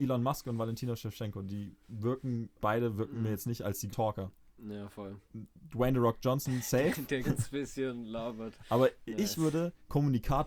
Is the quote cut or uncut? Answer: cut